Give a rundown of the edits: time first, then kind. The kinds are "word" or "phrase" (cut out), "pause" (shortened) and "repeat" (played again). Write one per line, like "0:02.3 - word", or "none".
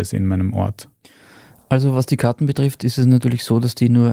none

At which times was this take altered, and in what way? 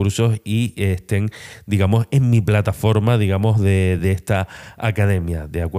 none

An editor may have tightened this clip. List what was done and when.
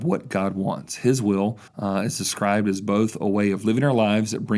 0:01.7 - pause

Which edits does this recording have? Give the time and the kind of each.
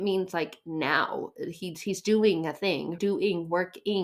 0:03.0 - word

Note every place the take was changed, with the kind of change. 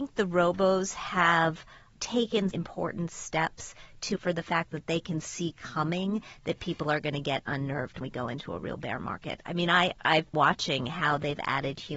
0:02.5 - word
0:04.2 - word
0:08.0 - word
0:10.3 - word

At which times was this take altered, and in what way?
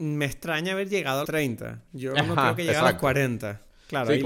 0:01.2 - word

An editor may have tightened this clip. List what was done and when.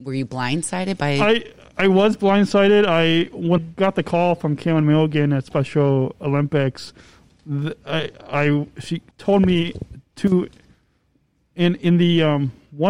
0:03.6 - word
0:07.3 - word
0:09.1 - pause

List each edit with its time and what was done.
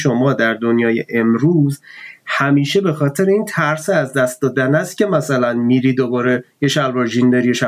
none

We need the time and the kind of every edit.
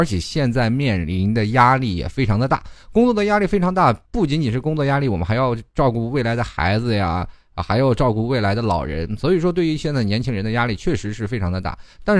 0:04.1 - pause

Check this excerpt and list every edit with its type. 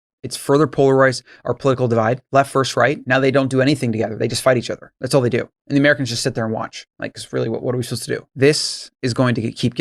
0:06.9 - pause
0:08.3 - pause

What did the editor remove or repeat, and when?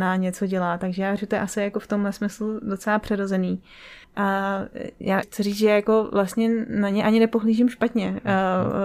0:01.2 - word
0:04.0 - pause
0:05.2 - word

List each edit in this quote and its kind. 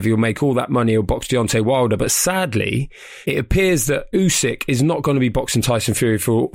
none

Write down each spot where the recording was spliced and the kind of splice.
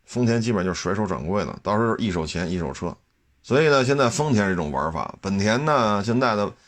0:03.1 - pause

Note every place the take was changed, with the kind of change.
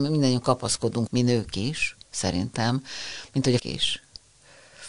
0:01.1 - word
0:02.0 - pause
0:03.6 - word

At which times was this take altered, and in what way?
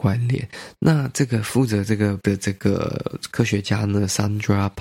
0:02.2 - word

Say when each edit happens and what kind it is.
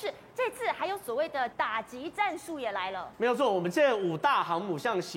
0:01.5 - word

